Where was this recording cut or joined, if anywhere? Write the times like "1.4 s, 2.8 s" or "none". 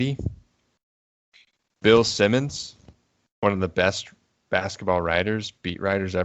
none